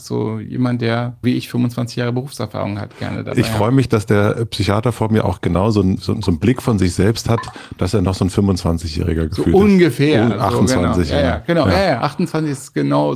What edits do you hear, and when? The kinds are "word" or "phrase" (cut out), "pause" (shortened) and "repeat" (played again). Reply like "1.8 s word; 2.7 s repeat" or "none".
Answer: 1.2 s word; 6.0 s word